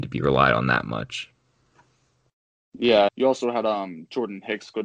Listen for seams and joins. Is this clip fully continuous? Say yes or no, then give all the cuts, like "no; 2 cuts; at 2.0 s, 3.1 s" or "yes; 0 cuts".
no; 1 cut; at 3.1 s